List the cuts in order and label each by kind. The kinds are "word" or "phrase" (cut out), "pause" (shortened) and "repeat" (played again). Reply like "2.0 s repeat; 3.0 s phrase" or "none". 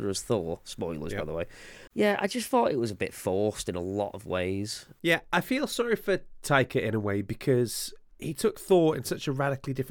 none

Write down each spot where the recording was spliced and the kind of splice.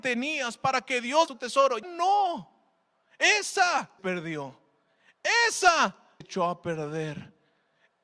1.3 s word; 1.8 s word; 4.0 s word; 6.2 s word

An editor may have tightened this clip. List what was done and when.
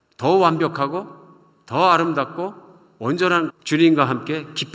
3.5 s word

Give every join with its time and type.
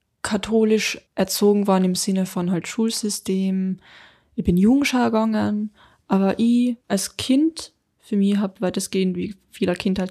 1.1 s pause; 6.8 s pause

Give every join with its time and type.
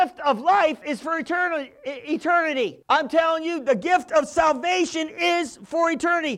2.8 s pause

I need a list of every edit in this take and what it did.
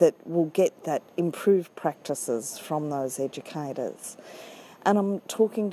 none

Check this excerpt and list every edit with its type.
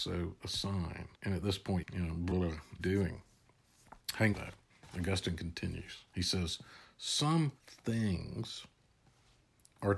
1.1 s pause; 1.8 s phrase; 2.3 s word; 2.8 s phrase; 4.3 s phrase; 6.1 s pause; 7.6 s pause

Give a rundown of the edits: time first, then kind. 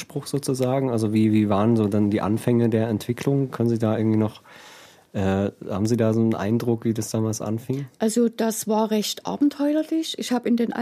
none

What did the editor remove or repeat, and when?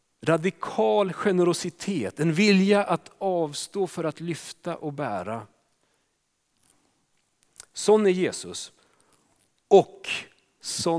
none

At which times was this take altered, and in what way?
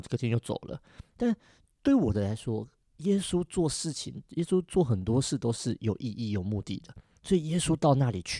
none

